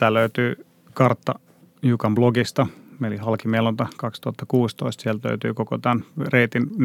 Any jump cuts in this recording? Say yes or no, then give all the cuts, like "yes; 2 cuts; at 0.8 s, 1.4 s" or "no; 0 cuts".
no; 0 cuts